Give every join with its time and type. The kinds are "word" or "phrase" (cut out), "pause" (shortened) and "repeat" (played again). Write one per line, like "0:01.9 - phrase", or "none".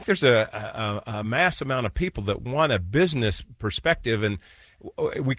none